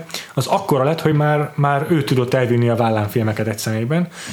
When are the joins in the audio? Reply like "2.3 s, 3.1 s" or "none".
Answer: none